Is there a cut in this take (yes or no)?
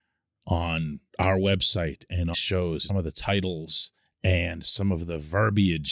yes